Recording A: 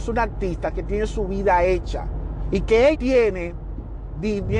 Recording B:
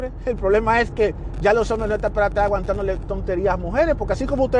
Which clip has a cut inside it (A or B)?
A